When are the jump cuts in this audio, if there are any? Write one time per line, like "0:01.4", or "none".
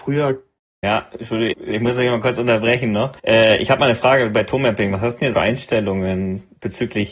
0:01.5
0:03.2
0:05.3

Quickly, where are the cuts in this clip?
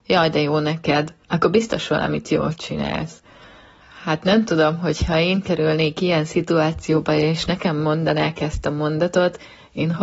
0:01.2

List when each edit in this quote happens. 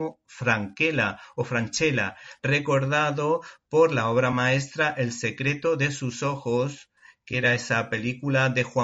none

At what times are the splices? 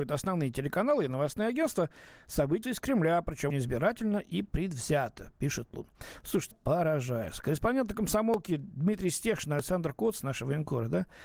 0:02.6
0:03.5
0:06.5

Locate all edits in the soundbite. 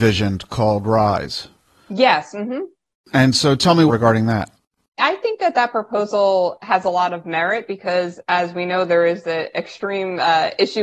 0:03.9

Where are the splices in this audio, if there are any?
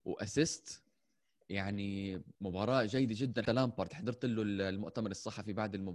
0:02.3
0:03.4

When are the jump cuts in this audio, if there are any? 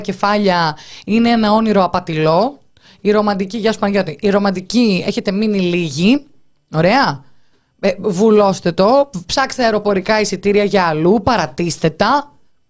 none

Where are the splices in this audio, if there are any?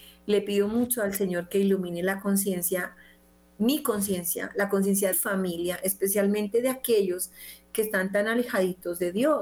0:05.1

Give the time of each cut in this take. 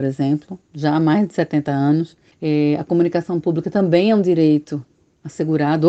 none

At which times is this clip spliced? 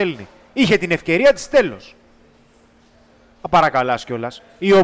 none

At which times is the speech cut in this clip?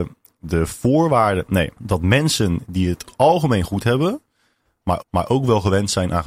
0:01.8
0:03.1
0:05.0

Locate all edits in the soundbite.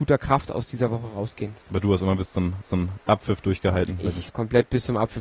0:01.6
0:02.6
0:04.3

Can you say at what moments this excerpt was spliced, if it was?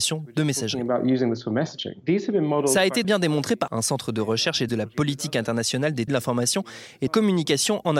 0:03.0
0:03.7
0:04.7
0:06.1
0:07.1

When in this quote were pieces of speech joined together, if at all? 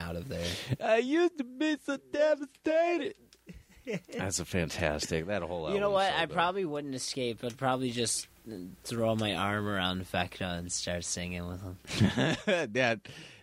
0:11.8

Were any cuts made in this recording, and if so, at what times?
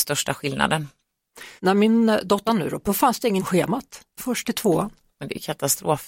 0:01.6
0:02.5
0:02.9
0:03.4
0:04.2

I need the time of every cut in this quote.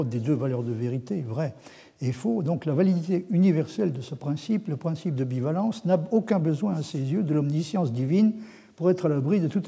none

